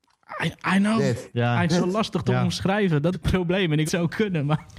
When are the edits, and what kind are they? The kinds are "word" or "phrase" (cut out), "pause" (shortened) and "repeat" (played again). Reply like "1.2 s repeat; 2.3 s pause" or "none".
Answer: 1.7 s phrase; 3.1 s word; 3.9 s phrase